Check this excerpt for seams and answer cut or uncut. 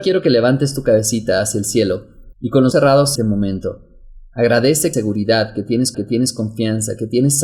cut